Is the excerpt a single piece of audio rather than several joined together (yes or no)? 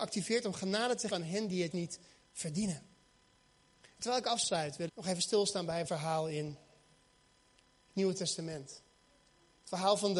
no